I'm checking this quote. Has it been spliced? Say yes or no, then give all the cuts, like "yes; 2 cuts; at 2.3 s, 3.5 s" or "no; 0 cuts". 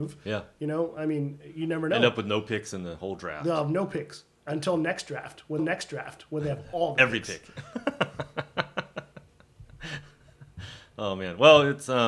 yes; 1 cut; at 5.6 s